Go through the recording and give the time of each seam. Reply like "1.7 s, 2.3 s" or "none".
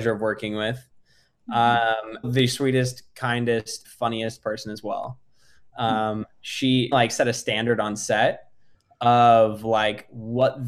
2.2 s, 3.8 s, 6.9 s